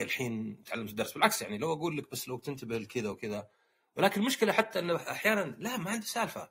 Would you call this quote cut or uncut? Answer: uncut